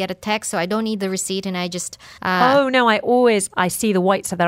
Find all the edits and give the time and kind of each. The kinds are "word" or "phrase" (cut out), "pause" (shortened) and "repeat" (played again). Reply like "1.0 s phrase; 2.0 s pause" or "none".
2.2 s pause; 3.5 s phrase